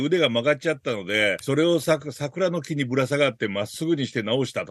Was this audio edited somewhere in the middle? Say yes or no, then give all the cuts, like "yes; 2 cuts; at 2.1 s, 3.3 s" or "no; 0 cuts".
yes; 1 cut; at 1.4 s